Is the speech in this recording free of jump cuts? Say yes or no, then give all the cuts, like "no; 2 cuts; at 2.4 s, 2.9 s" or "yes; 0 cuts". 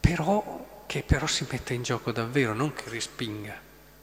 yes; 0 cuts